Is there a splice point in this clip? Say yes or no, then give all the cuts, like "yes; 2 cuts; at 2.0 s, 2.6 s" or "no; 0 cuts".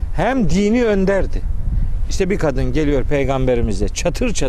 no; 0 cuts